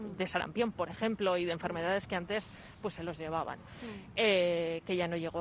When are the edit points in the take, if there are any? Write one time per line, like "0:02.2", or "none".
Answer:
none

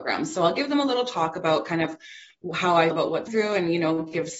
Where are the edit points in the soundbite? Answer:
0:02.9
0:03.3

